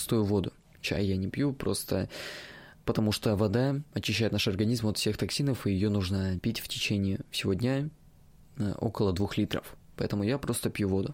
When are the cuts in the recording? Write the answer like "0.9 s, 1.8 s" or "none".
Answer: none